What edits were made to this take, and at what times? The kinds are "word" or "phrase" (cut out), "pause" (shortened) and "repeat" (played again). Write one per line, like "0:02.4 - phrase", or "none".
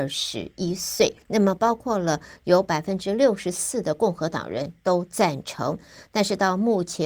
0:01.2 - pause